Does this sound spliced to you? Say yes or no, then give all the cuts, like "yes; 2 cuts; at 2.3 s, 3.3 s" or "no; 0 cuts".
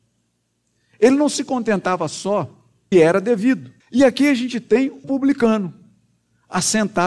yes; 3 cuts; at 2.9 s, 3.8 s, 5.0 s